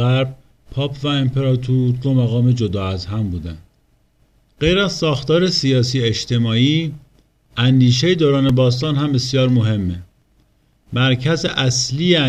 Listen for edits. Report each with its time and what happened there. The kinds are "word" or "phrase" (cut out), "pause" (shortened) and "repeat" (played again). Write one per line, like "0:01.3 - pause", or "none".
none